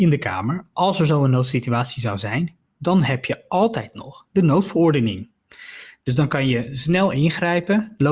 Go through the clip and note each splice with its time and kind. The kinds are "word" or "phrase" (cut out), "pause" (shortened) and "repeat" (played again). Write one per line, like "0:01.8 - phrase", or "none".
none